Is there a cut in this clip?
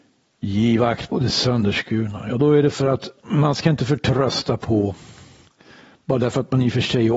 no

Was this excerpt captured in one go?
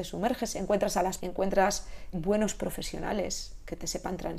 no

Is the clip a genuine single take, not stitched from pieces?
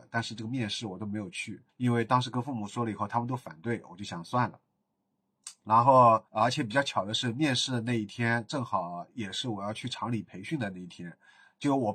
no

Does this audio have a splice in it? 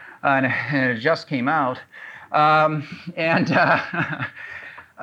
no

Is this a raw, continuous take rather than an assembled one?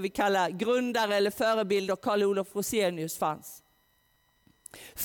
yes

